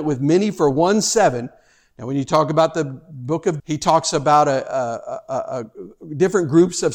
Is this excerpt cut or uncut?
cut